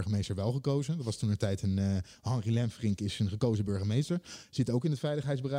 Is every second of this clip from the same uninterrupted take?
yes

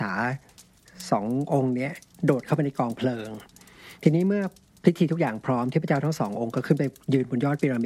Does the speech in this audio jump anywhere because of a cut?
no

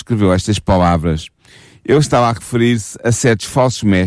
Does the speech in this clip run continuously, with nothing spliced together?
yes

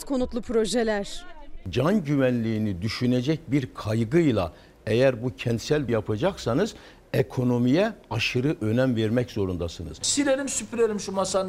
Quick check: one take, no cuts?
no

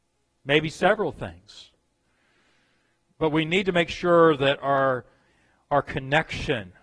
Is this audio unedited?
yes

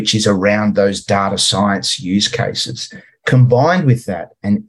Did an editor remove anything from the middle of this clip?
no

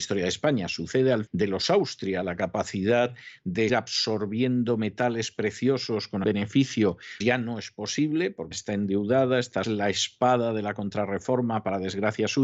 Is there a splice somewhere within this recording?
yes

